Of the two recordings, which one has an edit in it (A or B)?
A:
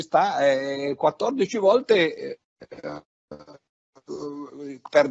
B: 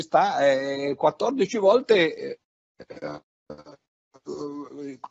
A